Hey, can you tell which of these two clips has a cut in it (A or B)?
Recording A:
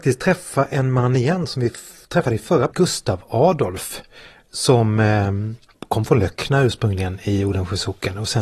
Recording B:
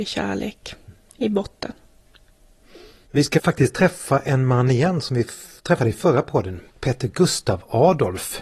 A